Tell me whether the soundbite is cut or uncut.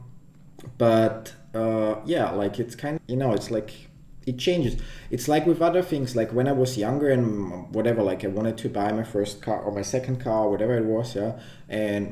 cut